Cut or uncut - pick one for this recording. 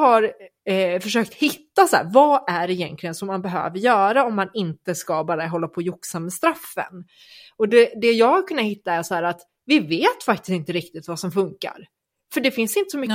uncut